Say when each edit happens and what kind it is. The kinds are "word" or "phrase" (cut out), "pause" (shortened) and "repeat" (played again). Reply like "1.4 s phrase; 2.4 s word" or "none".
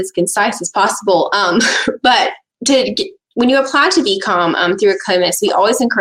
none